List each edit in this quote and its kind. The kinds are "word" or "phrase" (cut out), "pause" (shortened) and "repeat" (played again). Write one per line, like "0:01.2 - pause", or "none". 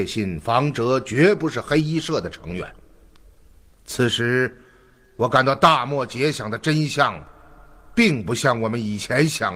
none